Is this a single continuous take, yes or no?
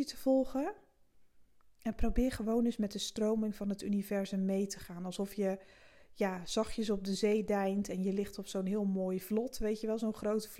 yes